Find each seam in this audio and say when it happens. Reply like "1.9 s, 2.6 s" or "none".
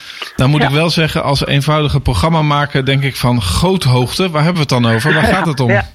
none

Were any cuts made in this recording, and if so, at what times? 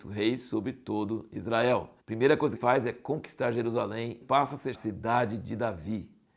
2.0 s, 2.5 s, 4.2 s, 4.7 s

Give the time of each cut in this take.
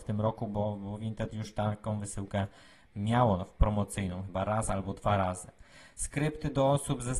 none

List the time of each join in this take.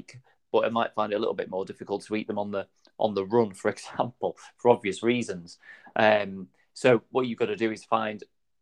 none

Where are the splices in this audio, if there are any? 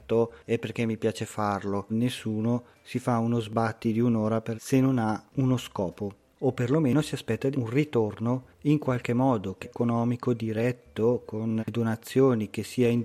1.9 s, 4.5 s, 7.5 s, 9.6 s, 11.6 s

